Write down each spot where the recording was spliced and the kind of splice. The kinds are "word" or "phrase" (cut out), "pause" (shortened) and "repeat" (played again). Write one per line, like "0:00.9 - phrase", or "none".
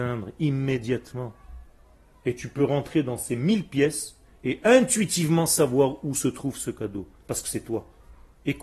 none

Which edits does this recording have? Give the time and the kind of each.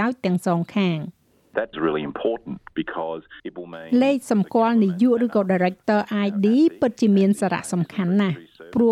0:01.7 - phrase
0:03.4 - pause

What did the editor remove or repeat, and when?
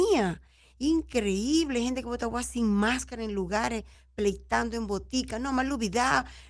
none

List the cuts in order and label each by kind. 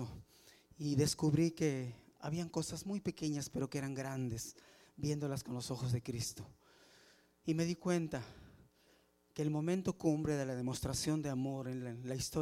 none

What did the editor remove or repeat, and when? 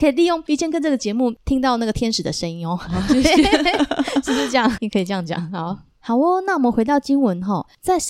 0:04.8 - word

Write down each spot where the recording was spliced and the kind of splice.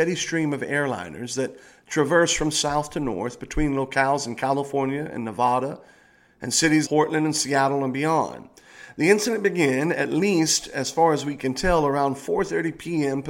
0:06.8 - word

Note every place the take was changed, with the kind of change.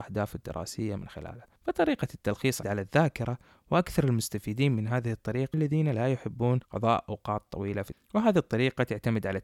0:01.6 - pause
0:02.6 - phrase
0:05.5 - word
0:06.6 - pause
0:07.9 - phrase

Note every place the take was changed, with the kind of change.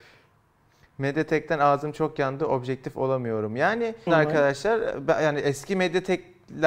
0:04.1 - phrase

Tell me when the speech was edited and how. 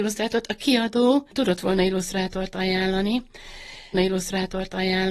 0:03.9 - repeat

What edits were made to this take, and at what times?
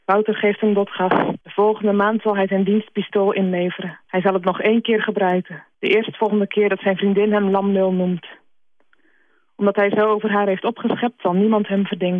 0:01.4 - pause
0:04.0 - pause
0:05.7 - pause

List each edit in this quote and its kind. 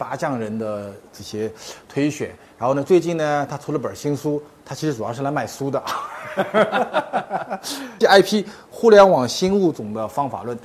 0:08.0 - phrase

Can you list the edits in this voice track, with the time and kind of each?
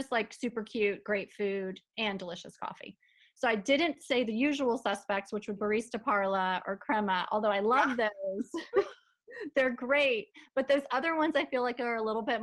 0:05.6 - word

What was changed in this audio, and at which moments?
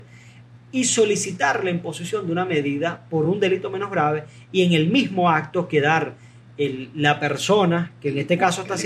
none

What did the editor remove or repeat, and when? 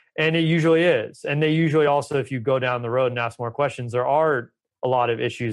none

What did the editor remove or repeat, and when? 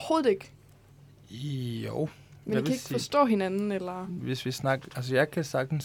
none

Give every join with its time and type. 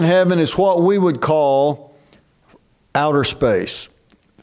none

